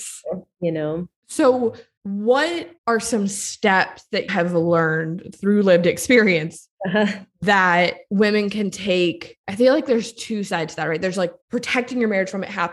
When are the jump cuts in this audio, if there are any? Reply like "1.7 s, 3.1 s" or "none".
1.2 s, 2.8 s, 4.3 s, 9.4 s, 11.4 s